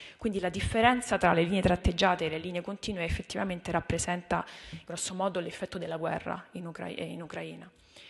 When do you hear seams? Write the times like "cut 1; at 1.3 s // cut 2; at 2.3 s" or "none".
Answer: none

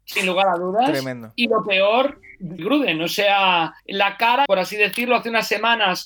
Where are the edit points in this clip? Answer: cut 1; at 2.6 s // cut 2; at 3.8 s // cut 3; at 4.5 s

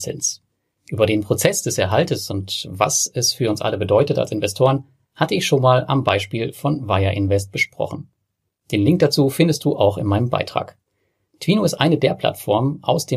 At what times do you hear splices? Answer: none

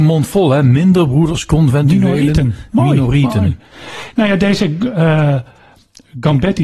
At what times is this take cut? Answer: none

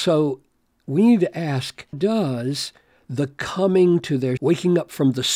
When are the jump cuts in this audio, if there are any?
cut 1; at 1.9 s // cut 2; at 4.4 s

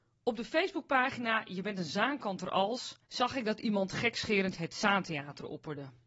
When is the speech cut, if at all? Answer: cut 1; at 3.0 s

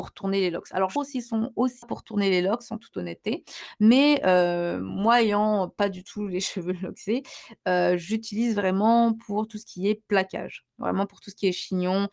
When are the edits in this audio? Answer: cut 1; at 1.0 s // cut 2; at 1.8 s

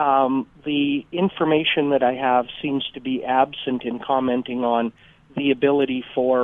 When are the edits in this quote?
none

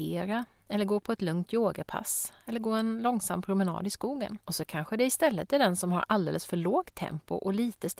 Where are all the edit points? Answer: cut 1; at 4.4 s

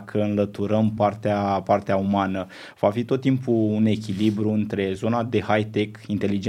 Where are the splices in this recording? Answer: none

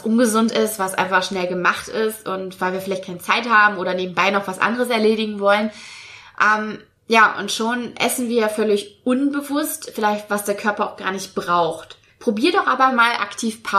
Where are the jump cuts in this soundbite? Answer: cut 1; at 12.1 s

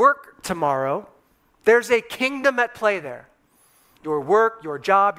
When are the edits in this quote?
none

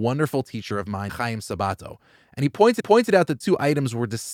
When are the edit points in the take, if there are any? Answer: cut 1; at 1.1 s // cut 2; at 2.8 s // cut 3; at 3.4 s

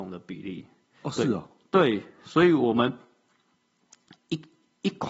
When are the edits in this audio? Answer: none

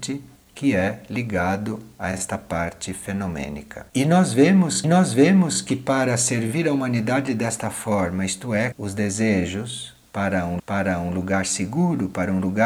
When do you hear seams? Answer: cut 1; at 3.9 s // cut 2; at 4.8 s // cut 3; at 8.7 s // cut 4; at 10.6 s

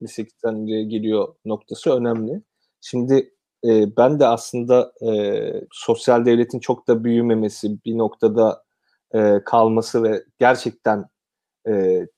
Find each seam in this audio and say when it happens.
cut 1; at 5.7 s

